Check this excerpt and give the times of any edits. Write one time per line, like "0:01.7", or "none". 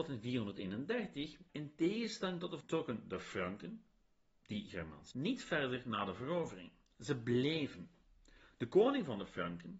0:01.5
0:02.6
0:05.1